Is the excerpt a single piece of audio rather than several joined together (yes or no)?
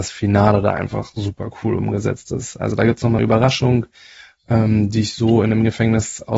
no